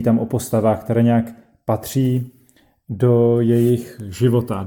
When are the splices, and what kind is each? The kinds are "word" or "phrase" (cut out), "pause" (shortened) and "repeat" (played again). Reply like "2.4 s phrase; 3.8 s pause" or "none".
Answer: none

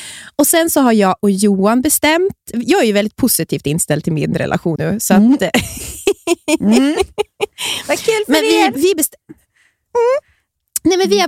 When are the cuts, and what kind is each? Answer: 2.5 s word; 4.8 s word

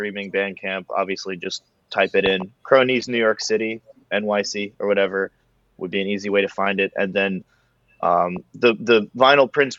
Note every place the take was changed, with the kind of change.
none

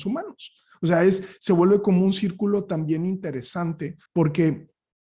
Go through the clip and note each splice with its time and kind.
4.1 s pause

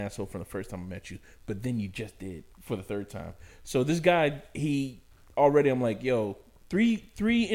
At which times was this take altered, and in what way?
2.5 s pause

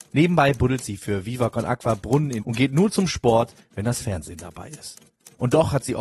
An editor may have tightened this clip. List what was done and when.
2.4 s word

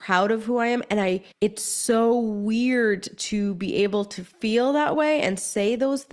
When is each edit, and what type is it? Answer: 1.3 s pause; 4.3 s pause

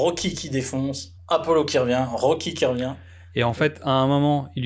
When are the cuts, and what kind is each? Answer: none

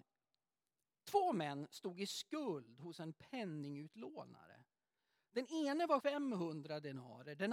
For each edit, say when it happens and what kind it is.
6.0 s word

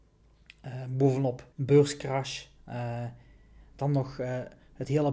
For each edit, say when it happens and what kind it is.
1.5 s pause

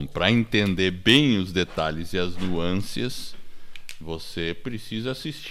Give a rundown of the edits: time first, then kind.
none

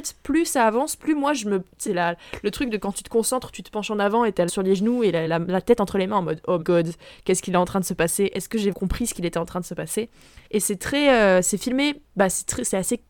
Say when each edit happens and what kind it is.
1.9 s word; 4.5 s word; 5.3 s word; 6.6 s word; 8.7 s word; 10.5 s pause; 12.1 s pause

